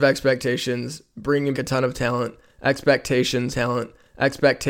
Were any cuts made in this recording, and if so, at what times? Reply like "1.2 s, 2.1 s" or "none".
1.5 s, 3.5 s